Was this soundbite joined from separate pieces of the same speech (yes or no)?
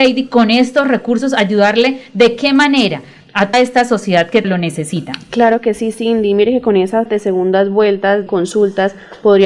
yes